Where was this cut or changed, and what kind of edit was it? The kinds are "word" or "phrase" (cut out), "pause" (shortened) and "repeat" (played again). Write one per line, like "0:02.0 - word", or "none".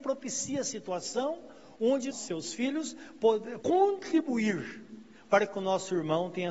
0:02.1 - word
0:03.6 - word